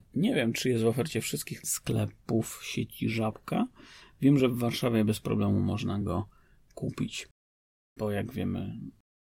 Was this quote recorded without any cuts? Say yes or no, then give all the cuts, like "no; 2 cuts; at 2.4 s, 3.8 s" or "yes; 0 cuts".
yes; 0 cuts